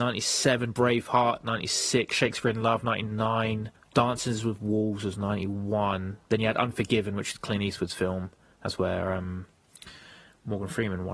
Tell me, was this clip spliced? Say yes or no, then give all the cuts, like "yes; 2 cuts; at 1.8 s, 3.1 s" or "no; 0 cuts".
yes; 2 cuts; at 3.7 s, 6.2 s